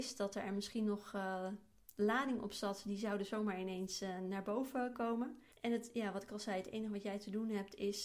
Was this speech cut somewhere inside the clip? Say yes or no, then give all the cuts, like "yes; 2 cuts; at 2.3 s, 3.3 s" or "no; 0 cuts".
yes; 2 cuts; at 4.9 s, 5.5 s